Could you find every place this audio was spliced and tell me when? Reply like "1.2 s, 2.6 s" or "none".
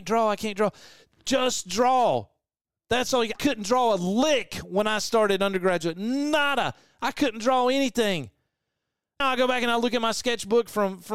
3.4 s, 9.2 s